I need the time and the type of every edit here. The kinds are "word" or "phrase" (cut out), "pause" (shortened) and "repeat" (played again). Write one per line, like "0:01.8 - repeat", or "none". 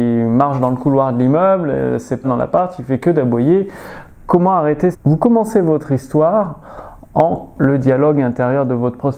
0:02.2 - phrase
0:04.9 - phrase
0:07.6 - word